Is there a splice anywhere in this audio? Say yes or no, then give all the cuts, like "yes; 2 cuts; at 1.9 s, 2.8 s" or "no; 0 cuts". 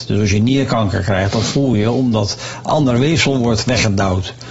no; 0 cuts